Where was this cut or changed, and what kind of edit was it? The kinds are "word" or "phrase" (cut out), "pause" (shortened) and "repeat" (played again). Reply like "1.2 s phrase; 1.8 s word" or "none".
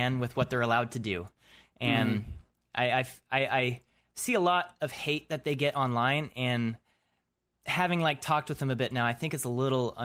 none